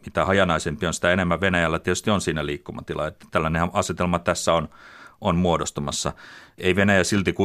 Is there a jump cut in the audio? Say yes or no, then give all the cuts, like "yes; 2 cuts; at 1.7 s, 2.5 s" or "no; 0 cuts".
no; 0 cuts